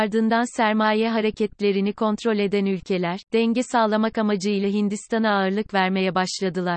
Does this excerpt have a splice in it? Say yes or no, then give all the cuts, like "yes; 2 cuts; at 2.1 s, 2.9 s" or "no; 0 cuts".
no; 0 cuts